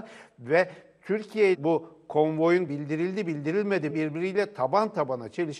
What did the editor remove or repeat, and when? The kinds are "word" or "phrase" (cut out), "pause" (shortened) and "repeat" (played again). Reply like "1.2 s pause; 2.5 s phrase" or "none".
1.5 s phrase; 2.7 s word; 3.9 s word